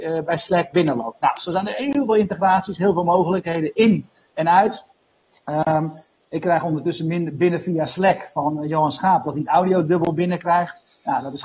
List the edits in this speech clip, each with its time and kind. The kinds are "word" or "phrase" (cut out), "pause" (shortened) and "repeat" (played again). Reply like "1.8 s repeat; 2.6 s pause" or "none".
none

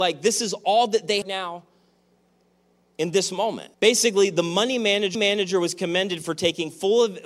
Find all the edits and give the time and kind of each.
1.2 s phrase; 3.7 s pause; 5.1 s repeat

